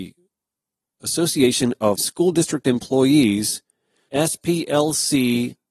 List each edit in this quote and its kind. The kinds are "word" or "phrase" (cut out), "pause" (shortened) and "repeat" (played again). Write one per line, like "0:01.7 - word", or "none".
0:02.0 - word
0:04.1 - phrase